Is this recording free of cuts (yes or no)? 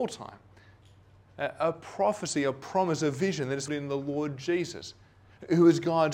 no